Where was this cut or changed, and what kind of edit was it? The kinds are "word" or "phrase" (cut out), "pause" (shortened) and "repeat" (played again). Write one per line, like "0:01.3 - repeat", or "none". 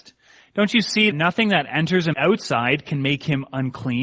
0:01.1 - word
0:02.1 - phrase